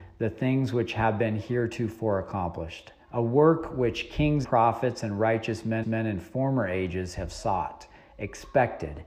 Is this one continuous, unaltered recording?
no; 3 cuts; at 3.0 s, 4.4 s, 5.8 s

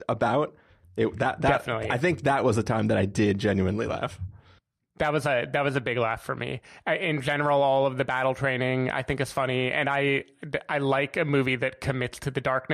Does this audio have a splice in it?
no; 0 cuts

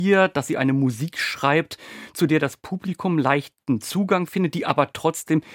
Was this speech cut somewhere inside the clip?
no; 0 cuts

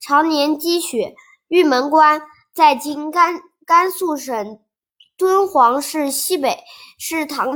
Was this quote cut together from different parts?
no; 0 cuts

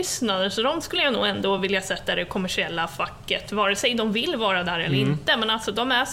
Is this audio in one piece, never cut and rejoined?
yes; 0 cuts

